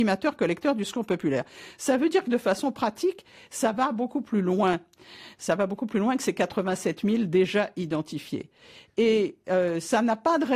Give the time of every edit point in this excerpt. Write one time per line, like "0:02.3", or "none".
none